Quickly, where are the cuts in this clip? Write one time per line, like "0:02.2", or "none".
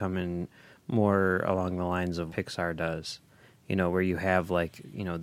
0:02.3